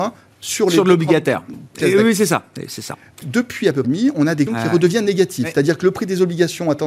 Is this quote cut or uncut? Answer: cut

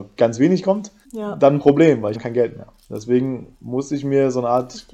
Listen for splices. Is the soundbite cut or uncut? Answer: cut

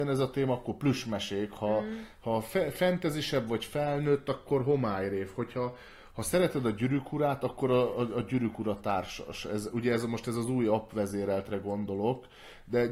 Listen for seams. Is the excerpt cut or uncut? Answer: uncut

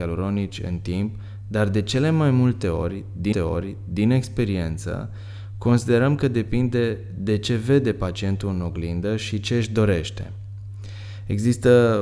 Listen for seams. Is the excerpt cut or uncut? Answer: cut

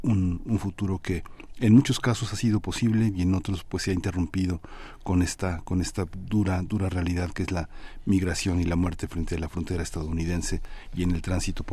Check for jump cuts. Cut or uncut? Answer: uncut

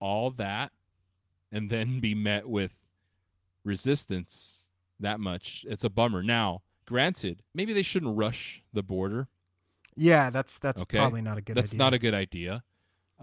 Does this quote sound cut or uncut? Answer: cut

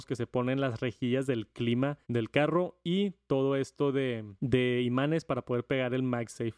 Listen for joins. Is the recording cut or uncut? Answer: cut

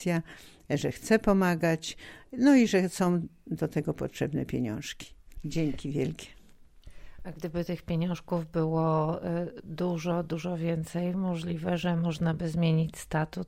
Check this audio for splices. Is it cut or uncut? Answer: uncut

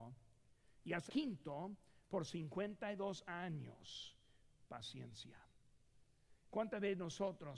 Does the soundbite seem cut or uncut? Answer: cut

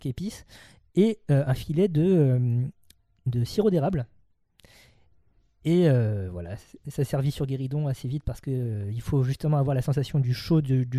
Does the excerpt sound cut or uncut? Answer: uncut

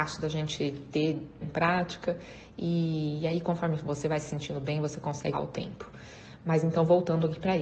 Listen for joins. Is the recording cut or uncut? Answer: cut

